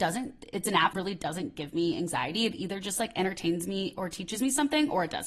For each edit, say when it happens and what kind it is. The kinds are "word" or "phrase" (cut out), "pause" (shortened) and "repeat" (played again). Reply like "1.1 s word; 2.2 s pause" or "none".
0.9 s word